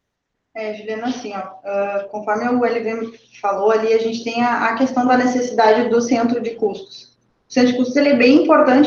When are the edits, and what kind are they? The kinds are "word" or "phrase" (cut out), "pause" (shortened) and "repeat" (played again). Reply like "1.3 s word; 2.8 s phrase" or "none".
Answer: none